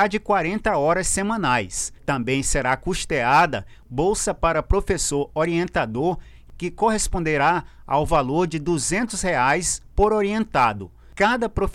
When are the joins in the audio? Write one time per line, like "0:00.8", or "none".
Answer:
0:02.0